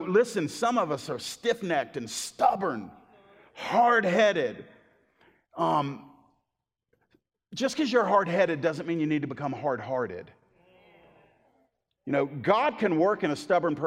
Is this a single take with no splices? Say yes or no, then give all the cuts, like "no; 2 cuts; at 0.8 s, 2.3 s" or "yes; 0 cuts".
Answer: yes; 0 cuts